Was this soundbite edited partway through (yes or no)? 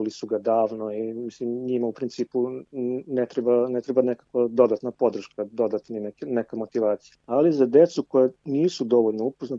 yes